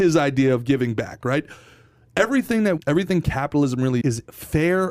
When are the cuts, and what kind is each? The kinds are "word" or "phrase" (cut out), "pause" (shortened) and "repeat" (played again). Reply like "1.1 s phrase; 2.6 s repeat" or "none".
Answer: 2.8 s phrase; 4.0 s word